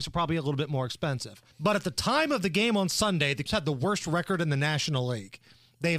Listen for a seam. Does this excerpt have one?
yes; 2 cuts; at 1.5 s, 3.5 s

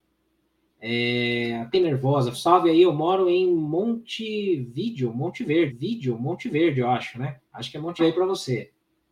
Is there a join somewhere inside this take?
yes; 5 cuts; at 1.7 s, 2.3 s, 5.7 s, 7.5 s, 8.0 s

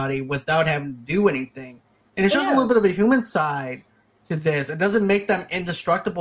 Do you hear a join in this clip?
no; 0 cuts

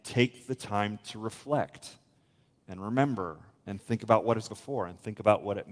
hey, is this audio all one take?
no; 1 cut; at 4.5 s

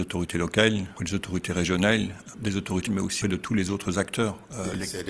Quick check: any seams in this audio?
yes; 4 cuts; at 1.0 s, 2.3 s, 2.9 s, 3.2 s

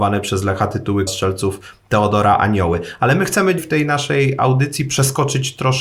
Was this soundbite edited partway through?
yes; 2 cuts; at 1.1 s, 3.6 s

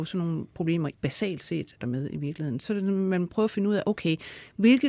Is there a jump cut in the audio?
yes; 3 cuts; at 0.9 s, 1.8 s, 2.6 s

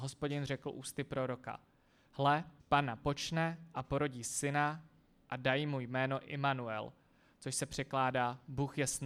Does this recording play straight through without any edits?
no; 1 cut; at 2.6 s

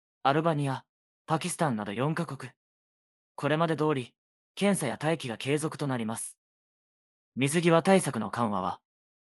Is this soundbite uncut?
yes; 0 cuts

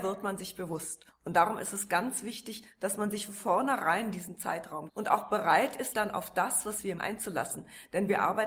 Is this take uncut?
no; 4 cuts; at 3.3 s, 4.9 s, 5.9 s, 7.0 s

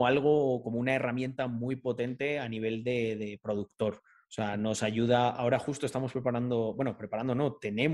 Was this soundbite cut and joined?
no; 0 cuts

